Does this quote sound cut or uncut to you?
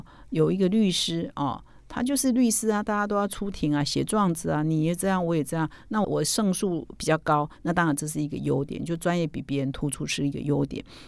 uncut